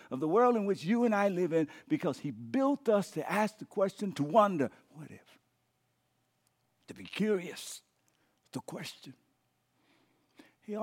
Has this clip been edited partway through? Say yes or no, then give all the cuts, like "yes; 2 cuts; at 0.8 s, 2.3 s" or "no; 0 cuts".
no; 0 cuts